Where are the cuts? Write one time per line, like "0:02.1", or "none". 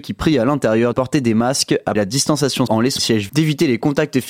0:00.9
0:02.0
0:02.7
0:03.0
0:03.3

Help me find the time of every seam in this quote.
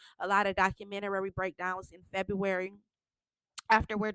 none

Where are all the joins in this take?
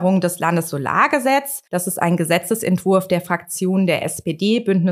0:01.7

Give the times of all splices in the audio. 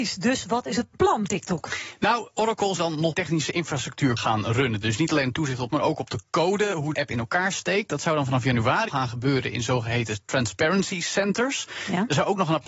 0:01.3
0:02.8
0:03.1
0:04.2
0:05.7
0:06.9
0:08.9

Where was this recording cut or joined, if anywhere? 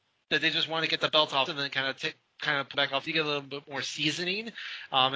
0:01.5
0:02.7
0:03.1

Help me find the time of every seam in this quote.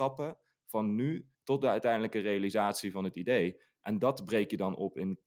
0:01.3

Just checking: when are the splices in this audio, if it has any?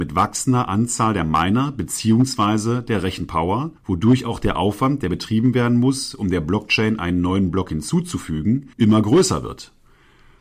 0:03.8
0:08.7

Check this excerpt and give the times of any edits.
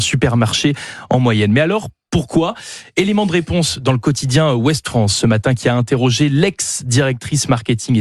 none

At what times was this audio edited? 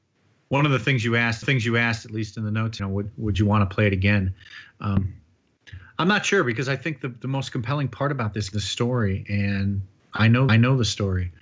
0:01.4
0:02.8
0:03.3
0:08.5
0:10.0
0:10.5

